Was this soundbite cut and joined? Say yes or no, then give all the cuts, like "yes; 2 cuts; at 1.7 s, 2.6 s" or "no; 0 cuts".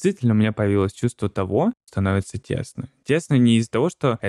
yes; 1 cut; at 1.9 s